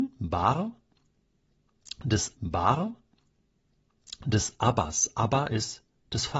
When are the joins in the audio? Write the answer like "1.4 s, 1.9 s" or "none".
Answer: 2.4 s